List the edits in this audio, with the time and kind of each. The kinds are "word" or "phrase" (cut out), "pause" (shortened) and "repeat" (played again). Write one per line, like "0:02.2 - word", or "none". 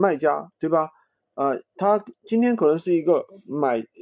none